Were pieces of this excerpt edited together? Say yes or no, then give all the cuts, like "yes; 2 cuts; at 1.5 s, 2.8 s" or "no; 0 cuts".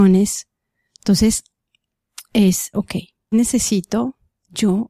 yes; 2 cuts; at 2.7 s, 3.3 s